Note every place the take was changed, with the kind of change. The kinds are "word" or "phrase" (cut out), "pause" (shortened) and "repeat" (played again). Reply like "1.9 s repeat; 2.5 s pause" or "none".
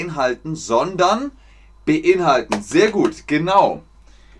none